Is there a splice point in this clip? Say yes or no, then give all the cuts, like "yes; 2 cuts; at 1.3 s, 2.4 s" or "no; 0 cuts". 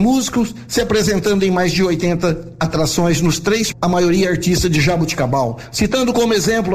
yes; 1 cut; at 3.7 s